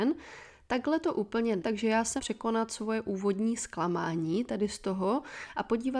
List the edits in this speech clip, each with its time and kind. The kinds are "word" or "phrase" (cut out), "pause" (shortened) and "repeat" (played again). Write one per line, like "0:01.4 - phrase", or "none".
0:01.6 - word
0:02.2 - word